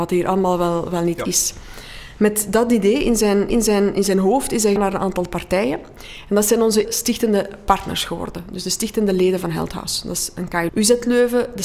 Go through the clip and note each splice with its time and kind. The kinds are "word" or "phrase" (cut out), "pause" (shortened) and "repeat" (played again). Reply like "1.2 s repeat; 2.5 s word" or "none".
3.5 s repeat; 4.8 s word; 6.8 s word; 10.7 s word